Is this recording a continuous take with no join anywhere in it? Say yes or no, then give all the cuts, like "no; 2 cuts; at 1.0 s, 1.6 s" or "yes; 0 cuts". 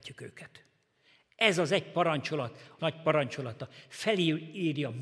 no; 1 cut; at 2.8 s